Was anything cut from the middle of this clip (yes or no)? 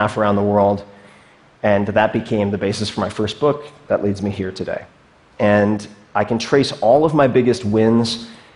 no